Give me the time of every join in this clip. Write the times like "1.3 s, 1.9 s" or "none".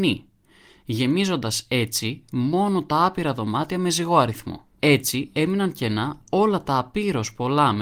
4.7 s